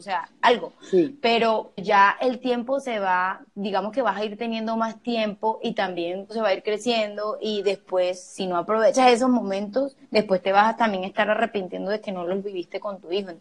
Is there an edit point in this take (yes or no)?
yes